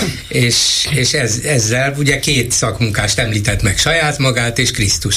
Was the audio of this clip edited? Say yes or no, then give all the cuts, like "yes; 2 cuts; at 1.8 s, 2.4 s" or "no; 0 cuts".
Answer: no; 0 cuts